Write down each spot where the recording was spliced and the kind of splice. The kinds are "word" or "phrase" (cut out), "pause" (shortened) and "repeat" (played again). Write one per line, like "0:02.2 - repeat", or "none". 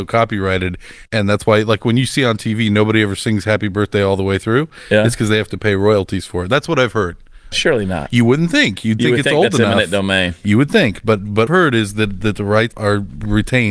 0:01.1 - pause
0:07.5 - phrase
0:11.5 - phrase
0:12.7 - word